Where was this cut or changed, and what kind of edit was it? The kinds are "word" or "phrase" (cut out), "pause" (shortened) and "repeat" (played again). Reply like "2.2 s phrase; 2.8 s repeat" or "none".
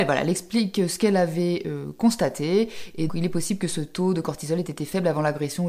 3.1 s word